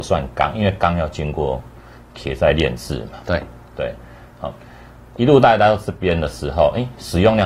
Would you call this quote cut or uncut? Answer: uncut